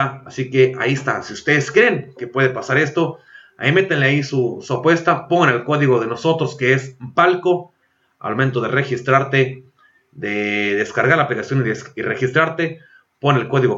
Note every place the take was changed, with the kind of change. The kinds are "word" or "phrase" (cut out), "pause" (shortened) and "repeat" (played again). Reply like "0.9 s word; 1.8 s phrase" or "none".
none